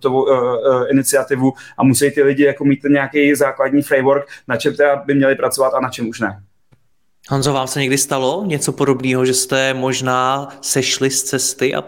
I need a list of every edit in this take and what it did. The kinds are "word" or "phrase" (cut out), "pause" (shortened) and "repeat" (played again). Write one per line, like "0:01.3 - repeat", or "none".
none

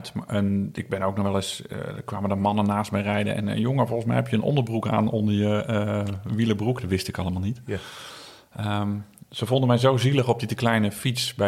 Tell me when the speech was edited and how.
none

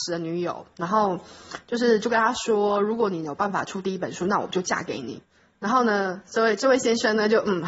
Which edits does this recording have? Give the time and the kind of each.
0:05.2 - pause

